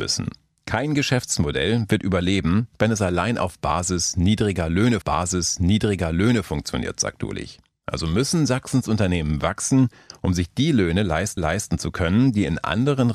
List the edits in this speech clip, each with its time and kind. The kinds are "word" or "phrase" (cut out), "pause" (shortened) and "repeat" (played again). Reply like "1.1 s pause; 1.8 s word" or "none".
5.0 s repeat; 11.4 s repeat